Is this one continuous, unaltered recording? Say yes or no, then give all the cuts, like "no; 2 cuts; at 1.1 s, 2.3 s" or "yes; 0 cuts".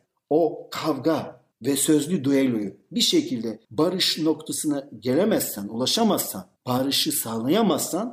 no; 3 cuts; at 1.5 s, 3.6 s, 6.6 s